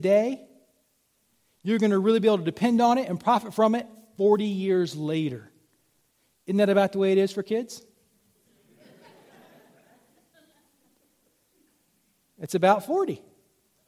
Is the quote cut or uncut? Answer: uncut